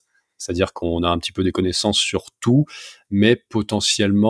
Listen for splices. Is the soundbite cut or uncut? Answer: uncut